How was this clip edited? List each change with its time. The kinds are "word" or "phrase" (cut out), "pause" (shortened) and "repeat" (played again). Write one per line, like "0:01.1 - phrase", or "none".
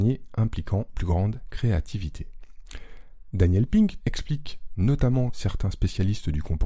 0:00.9 - word
0:04.0 - word
0:05.3 - word